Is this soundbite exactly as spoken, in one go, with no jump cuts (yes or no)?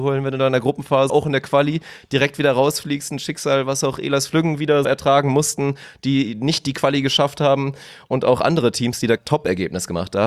no